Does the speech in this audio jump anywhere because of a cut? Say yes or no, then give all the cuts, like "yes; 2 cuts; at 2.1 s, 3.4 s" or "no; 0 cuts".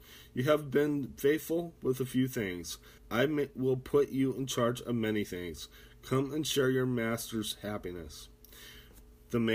yes; 1 cut; at 3.0 s